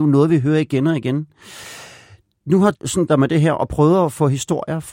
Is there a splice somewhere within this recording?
yes; 2 cuts; at 2.7 s, 3.1 s

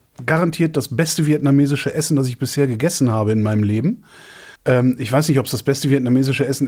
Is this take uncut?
no; 1 cut; at 4.6 s

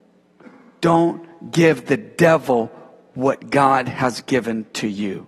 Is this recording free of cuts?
yes; 0 cuts

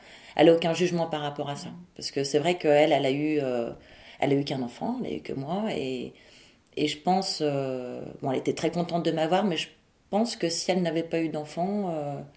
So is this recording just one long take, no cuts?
yes; 0 cuts

